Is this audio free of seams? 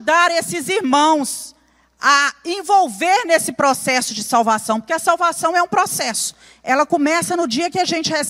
yes; 0 cuts

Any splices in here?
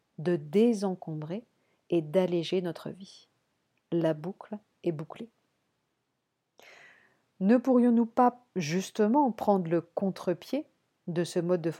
no; 0 cuts

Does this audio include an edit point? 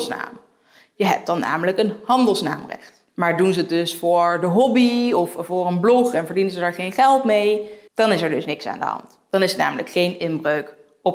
yes; 2 cuts; at 3.1 s, 7.9 s

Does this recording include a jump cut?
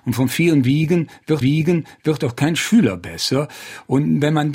yes; 1 cut; at 1.4 s

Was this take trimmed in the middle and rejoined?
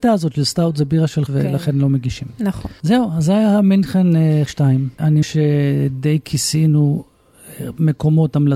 yes; 3 cuts; at 1.3 s, 4.5 s, 5.2 s

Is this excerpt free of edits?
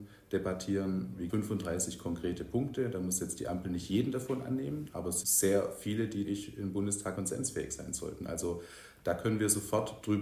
no; 4 cuts; at 1.3 s, 5.2 s, 6.2 s, 7.2 s

